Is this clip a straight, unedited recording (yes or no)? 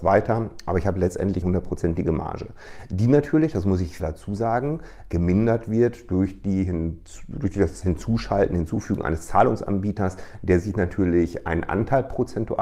no